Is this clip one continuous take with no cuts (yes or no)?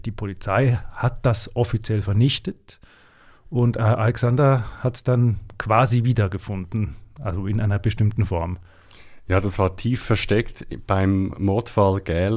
yes